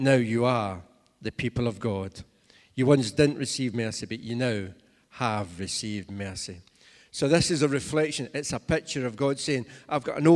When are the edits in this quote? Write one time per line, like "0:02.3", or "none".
none